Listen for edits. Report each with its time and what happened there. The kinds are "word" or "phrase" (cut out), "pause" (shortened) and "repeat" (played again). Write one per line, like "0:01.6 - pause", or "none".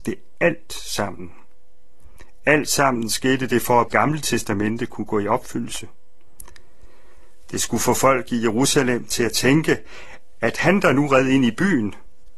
0:03.9 - phrase